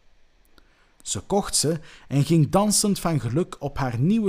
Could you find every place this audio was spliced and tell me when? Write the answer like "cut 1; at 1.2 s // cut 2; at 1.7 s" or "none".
none